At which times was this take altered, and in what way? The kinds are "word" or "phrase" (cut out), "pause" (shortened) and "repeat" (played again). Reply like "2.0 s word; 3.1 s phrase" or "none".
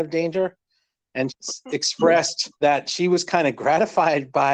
1.3 s word; 2.5 s pause